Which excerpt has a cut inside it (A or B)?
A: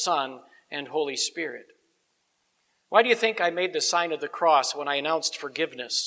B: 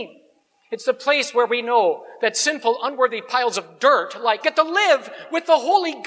B